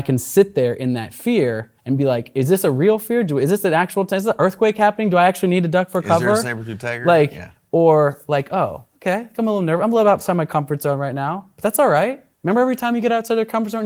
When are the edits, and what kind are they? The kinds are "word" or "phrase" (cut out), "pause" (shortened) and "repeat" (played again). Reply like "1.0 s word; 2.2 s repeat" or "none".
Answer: 1.8 s pause; 8.9 s pause; 12.3 s pause